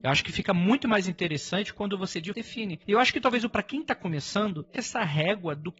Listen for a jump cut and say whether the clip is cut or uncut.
cut